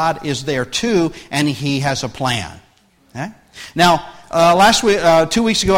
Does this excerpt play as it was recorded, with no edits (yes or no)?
yes